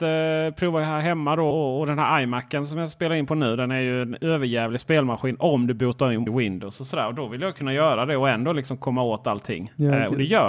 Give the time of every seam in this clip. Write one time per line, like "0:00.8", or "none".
0:01.5
0:06.3